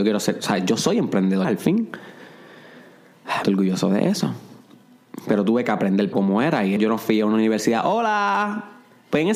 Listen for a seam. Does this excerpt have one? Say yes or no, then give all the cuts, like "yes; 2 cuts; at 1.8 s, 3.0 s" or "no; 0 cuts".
yes; 4 cuts; at 1.4 s, 3.4 s, 6.1 s, 6.8 s